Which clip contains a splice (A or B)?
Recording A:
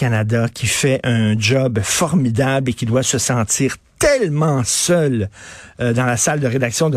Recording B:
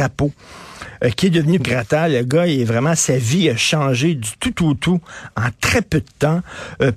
B